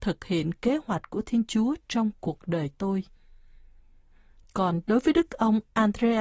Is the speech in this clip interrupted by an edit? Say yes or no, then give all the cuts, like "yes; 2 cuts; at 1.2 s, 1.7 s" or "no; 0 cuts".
no; 0 cuts